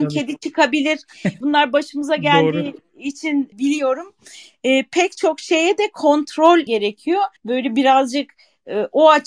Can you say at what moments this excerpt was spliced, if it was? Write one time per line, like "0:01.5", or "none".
0:01.4
0:03.5
0:06.7
0:07.4